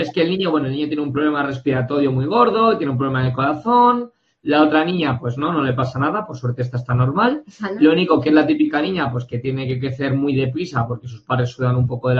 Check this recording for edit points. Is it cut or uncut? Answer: uncut